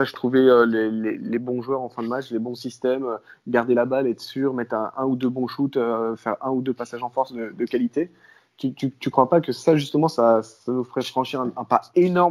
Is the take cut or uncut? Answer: uncut